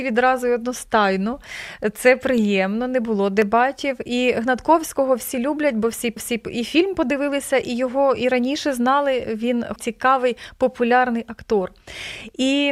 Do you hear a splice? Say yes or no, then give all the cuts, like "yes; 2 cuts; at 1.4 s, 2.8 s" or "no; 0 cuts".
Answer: yes; 2 cuts; at 6.2 s, 9.8 s